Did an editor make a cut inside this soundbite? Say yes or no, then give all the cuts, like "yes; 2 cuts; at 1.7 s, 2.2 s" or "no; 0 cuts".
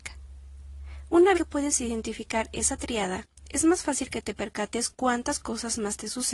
yes; 2 cuts; at 1.3 s, 4.9 s